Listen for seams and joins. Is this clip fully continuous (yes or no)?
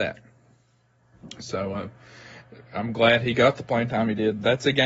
yes